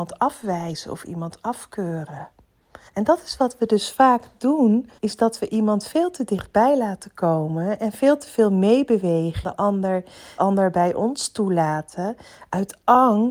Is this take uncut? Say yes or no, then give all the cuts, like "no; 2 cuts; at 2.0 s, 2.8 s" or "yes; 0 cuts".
no; 4 cuts; at 2.9 s, 5.0 s, 9.4 s, 10.4 s